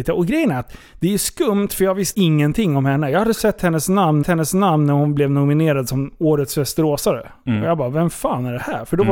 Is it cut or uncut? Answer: cut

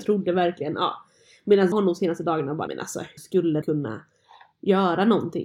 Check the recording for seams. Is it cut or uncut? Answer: cut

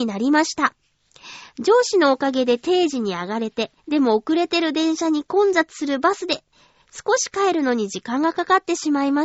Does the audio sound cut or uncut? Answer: cut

